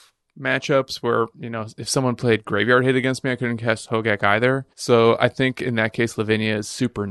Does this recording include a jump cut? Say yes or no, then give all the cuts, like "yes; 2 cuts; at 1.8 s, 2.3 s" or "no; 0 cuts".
yes; 1 cut; at 4.7 s